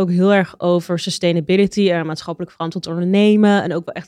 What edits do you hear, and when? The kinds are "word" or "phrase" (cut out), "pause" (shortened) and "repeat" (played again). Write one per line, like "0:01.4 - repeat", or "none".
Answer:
none

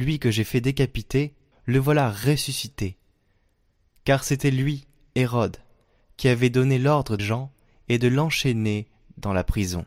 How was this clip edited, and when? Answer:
0:01.5 - word
0:07.2 - word

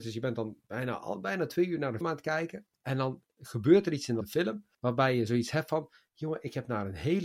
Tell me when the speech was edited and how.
0:02.0 - word
0:02.7 - pause
0:04.2 - phrase
0:04.7 - pause

